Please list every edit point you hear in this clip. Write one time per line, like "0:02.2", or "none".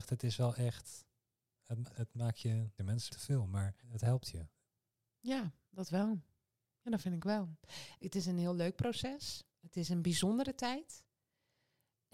0:01.9
0:02.8
0:03.1
0:03.8
0:09.5